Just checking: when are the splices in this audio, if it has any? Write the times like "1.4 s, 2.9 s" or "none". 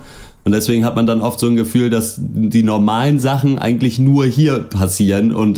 none